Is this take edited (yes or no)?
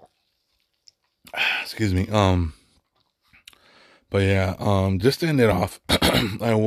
no